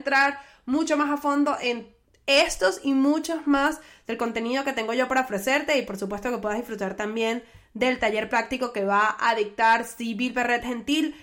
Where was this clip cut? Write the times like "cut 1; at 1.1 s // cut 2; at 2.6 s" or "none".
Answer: none